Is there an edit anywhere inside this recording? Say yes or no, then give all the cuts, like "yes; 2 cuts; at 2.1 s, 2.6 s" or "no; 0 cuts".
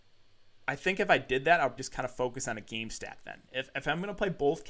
yes; 1 cut; at 1.8 s